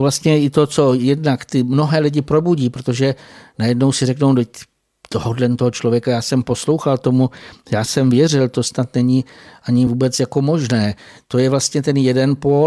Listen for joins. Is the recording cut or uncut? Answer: uncut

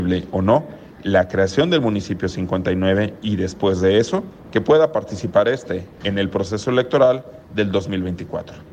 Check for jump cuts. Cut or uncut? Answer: cut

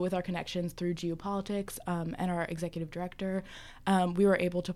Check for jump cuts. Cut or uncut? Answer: uncut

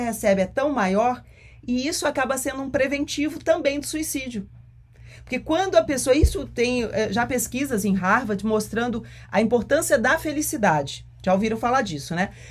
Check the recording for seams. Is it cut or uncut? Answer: uncut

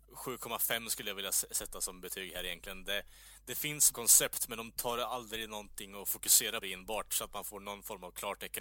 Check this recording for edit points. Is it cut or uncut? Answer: cut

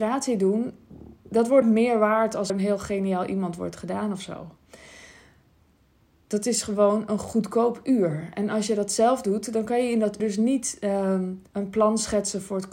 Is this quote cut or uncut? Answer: cut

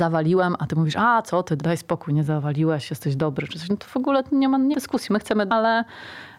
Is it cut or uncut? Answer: cut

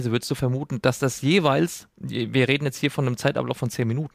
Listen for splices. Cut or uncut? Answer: uncut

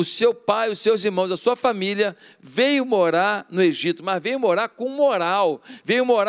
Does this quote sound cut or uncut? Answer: uncut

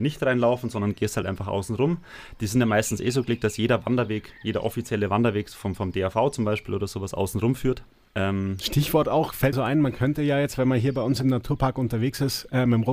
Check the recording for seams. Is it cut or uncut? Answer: cut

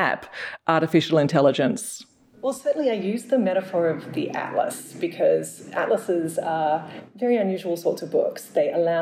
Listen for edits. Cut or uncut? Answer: uncut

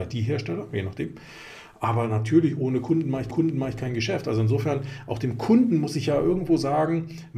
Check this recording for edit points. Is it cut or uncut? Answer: cut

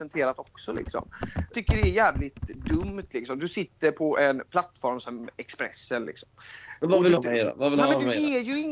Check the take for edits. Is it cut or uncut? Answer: cut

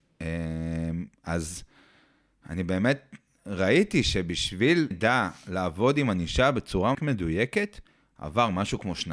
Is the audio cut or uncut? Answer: cut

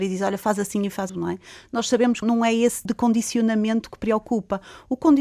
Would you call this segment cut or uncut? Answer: cut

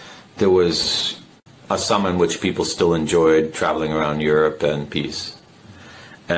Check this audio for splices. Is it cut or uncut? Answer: cut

